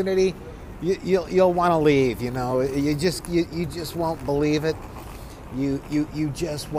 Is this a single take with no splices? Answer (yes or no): yes